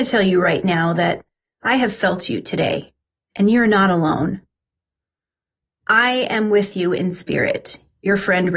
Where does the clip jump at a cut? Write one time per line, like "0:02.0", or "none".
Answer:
none